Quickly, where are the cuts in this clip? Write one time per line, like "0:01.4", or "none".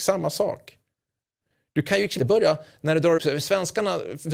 0:02.2
0:03.2